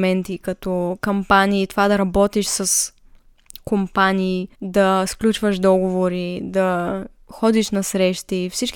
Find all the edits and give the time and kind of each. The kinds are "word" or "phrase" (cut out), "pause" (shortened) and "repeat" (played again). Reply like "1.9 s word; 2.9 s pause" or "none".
4.5 s pause